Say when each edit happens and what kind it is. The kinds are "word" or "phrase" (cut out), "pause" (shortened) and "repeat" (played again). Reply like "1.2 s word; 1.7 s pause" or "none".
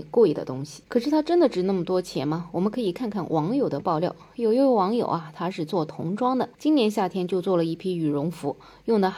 6.5 s pause

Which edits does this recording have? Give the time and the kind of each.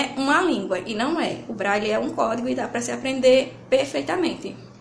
none

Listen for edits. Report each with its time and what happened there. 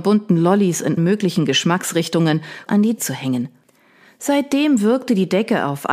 1.0 s word; 2.7 s word; 3.0 s word

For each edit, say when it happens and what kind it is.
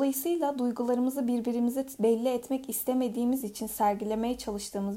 none

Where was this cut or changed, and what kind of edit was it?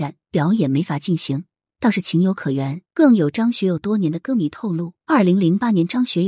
2.9 s pause; 5.0 s pause

